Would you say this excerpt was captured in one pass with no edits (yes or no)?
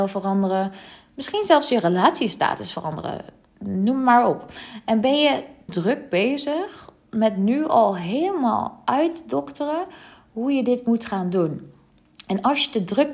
no